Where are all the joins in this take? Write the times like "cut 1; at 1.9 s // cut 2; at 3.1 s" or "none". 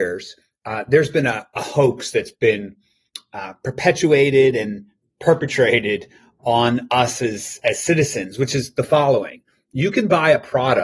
none